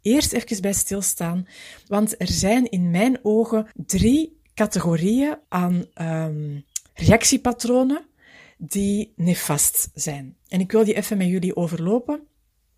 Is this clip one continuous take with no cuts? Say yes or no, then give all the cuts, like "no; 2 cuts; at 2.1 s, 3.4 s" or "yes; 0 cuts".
no; 3 cuts; at 3.7 s, 5.4 s, 6.9 s